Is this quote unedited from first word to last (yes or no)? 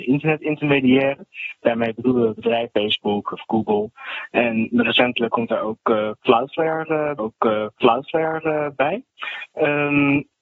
no